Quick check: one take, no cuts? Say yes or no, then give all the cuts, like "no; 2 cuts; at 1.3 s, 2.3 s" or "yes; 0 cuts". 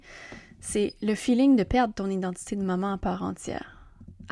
yes; 0 cuts